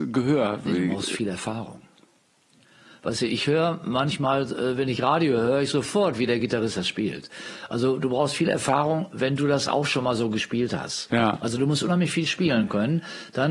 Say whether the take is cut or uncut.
uncut